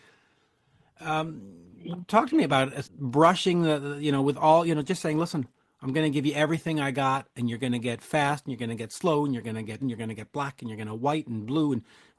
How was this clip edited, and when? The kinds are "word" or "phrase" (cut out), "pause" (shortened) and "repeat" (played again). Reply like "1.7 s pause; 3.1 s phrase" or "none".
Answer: 2.8 s word; 9.8 s word